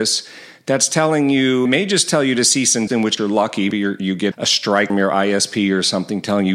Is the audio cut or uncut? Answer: cut